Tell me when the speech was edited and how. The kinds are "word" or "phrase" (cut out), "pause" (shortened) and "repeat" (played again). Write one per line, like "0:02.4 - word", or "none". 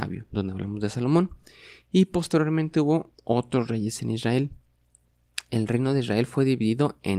0:03.1 - pause